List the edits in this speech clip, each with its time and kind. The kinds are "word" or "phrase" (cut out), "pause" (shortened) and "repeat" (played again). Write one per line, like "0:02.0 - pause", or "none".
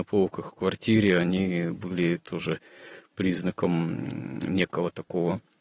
none